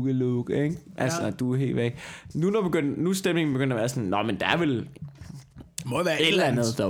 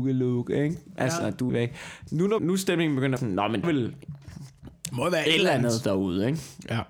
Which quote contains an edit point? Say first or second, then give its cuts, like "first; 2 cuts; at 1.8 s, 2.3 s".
second; 4 cuts; at 1.5 s, 2.4 s, 3.2 s, 3.6 s